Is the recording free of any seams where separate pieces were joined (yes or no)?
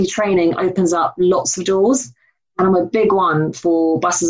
yes